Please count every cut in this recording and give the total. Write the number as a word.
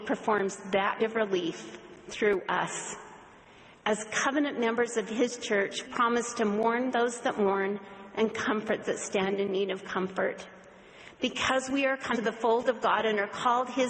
five